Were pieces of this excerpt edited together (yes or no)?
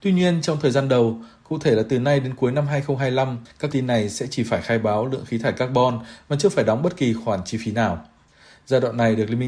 yes